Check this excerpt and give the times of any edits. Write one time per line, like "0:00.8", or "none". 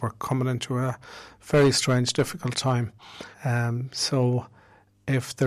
0:03.3